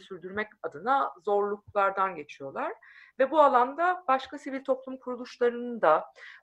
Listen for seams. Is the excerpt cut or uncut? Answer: uncut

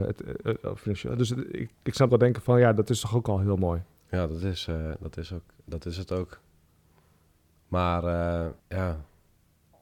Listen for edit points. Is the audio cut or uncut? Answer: cut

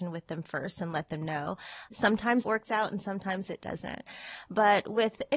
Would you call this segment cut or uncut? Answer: cut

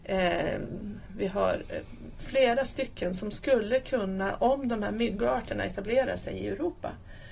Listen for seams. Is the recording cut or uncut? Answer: uncut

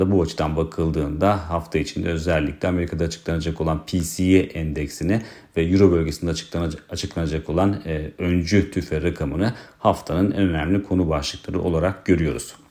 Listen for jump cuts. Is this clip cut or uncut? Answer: uncut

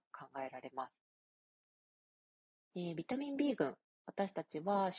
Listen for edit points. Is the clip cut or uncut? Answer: uncut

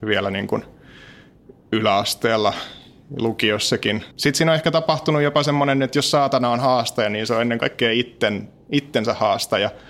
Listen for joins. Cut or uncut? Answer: cut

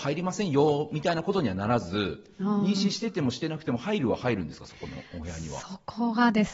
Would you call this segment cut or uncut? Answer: cut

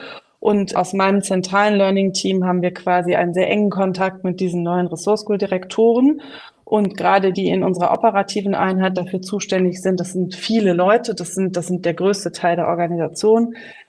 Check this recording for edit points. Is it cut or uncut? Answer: cut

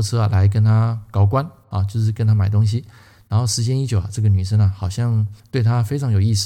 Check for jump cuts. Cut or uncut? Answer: uncut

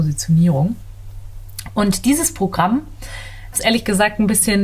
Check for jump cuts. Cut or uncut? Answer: cut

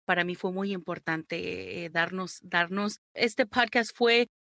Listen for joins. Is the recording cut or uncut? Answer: uncut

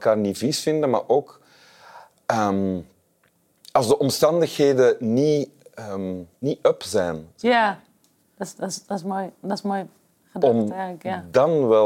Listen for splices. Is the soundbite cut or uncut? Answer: cut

